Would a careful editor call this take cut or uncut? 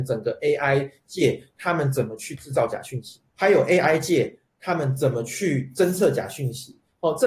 cut